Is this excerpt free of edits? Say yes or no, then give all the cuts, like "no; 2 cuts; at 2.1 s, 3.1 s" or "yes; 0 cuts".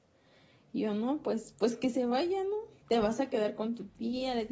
no; 1 cut; at 2.8 s